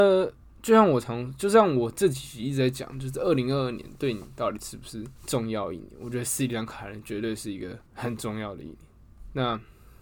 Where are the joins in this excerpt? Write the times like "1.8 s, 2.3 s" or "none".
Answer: 5.2 s, 7.9 s

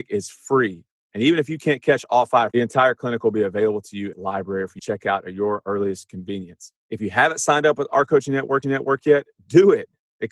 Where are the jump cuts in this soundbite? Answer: 2.5 s, 4.1 s, 4.8 s, 6.8 s, 8.6 s

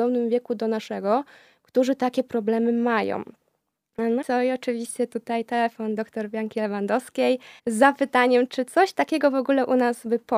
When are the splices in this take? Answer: 4.2 s, 6.0 s, 7.6 s, 8.5 s

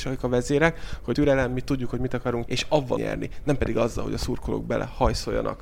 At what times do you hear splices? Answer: 1.1 s, 2.5 s, 3.0 s

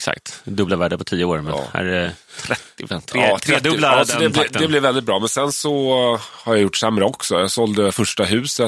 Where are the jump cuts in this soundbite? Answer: none

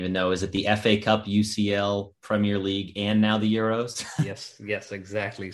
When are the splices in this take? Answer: none

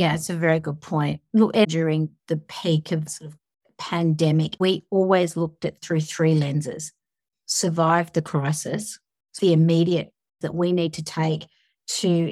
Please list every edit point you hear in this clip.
1.6 s, 3.1 s, 4.6 s, 5.8 s, 9.4 s, 10.4 s

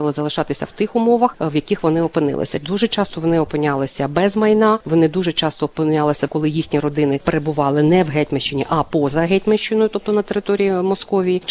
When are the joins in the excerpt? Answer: 6.3 s

